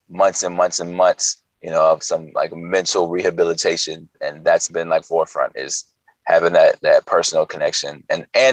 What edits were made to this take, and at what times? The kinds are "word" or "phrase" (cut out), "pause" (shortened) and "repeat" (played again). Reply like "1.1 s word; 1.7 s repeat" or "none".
2.0 s word; 4.1 s word; 5.0 s phrase